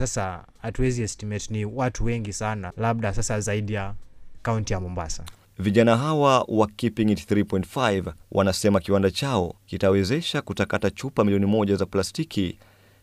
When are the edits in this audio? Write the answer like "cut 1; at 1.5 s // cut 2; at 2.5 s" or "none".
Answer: cut 1; at 5.5 s // cut 2; at 8.2 s // cut 3; at 9.6 s